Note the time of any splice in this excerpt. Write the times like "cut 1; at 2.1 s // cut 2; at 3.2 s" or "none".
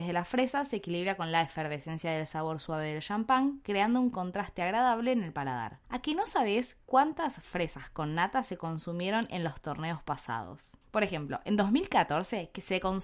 cut 1; at 5.8 s // cut 2; at 6.8 s // cut 3; at 10.8 s